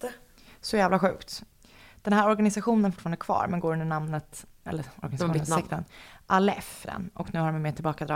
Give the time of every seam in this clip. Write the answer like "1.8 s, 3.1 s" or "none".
2.9 s, 4.7 s, 6.8 s